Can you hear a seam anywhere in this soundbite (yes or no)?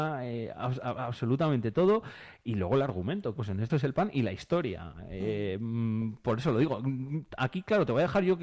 yes